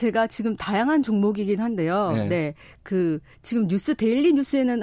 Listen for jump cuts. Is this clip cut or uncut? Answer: uncut